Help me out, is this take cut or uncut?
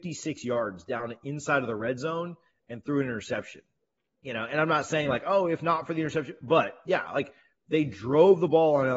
uncut